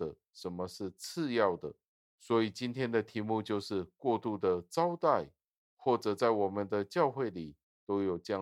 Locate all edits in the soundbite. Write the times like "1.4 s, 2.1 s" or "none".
none

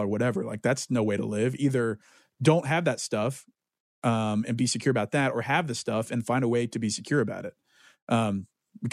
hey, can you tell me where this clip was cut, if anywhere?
none

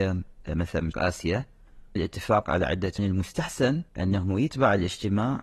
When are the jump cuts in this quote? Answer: 0.9 s, 2.0 s, 3.0 s, 3.9 s

